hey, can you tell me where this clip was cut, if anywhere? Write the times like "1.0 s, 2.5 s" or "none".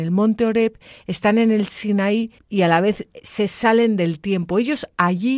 2.4 s